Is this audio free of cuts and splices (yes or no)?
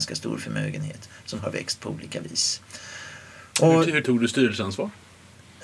no